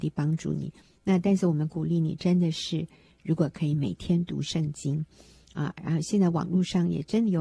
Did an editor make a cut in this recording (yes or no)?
no